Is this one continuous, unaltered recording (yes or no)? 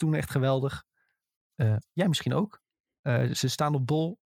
yes